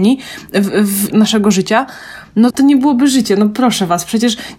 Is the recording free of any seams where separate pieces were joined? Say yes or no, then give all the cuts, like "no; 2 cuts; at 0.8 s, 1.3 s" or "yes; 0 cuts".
no; 2 cuts; at 1.1 s, 2.5 s